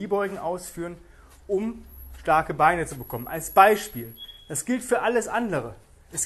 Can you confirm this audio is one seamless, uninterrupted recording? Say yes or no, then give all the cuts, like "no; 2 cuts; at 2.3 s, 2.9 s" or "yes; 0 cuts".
yes; 0 cuts